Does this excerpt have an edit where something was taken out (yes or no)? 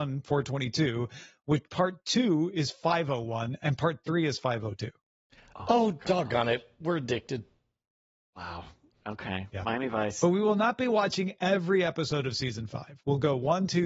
no